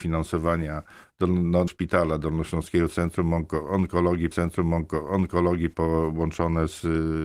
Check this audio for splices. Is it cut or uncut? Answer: cut